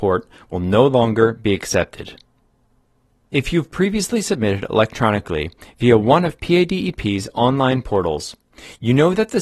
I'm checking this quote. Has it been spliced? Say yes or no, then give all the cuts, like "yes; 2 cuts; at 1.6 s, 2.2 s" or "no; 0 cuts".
no; 0 cuts